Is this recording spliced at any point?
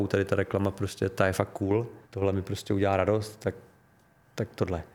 yes; 1 cut; at 2.0 s

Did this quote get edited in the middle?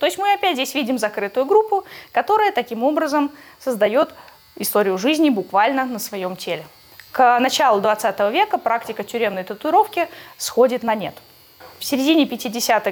no; 0 cuts

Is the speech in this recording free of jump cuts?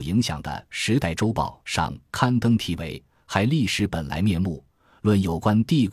yes; 0 cuts

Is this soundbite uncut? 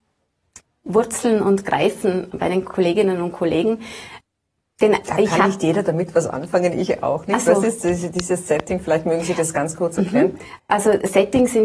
yes; 0 cuts

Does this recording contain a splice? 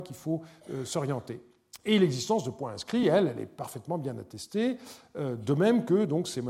no; 0 cuts

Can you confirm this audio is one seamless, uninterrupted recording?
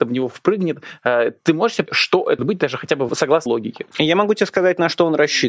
no; 4 cuts; at 1.9 s, 2.4 s, 3.1 s, 3.5 s

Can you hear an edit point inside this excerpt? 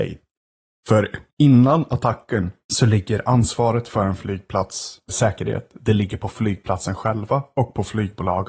yes; 3 cuts; at 1.3 s, 2.6 s, 5.1 s

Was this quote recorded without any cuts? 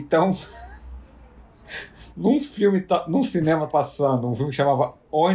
no; 1 cut; at 3.7 s

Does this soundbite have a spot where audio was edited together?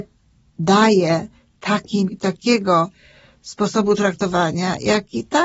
yes; 1 cut; at 2.1 s

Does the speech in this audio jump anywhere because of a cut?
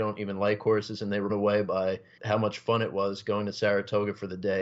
yes; 2 cuts; at 1.3 s, 2.2 s

